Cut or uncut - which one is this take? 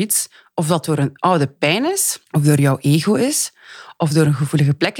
cut